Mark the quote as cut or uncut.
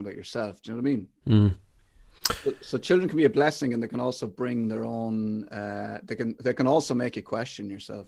cut